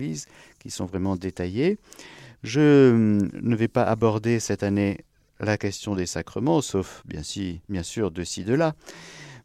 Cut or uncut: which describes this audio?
uncut